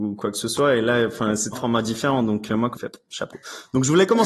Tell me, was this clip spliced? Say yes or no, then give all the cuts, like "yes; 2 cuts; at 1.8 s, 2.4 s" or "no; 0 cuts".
yes; 2 cuts; at 1.5 s, 2.8 s